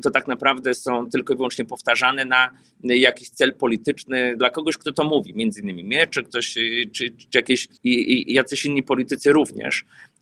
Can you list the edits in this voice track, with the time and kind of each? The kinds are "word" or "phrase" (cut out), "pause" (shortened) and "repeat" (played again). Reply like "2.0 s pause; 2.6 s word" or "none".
7.8 s pause